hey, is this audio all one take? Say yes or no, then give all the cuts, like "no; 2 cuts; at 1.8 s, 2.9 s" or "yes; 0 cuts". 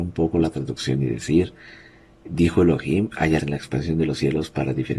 no; 1 cut; at 3.4 s